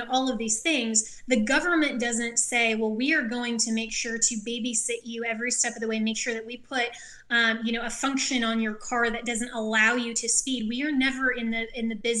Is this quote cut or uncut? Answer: uncut